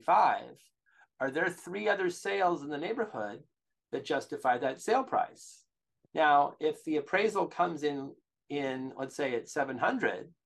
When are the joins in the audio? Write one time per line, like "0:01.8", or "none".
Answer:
none